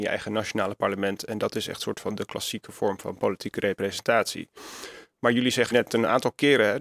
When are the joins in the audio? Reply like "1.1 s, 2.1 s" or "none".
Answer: 5.7 s